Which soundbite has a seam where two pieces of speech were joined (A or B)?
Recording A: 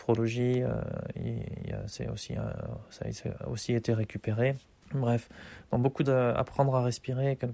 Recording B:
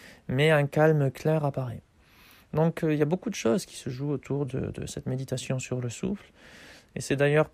A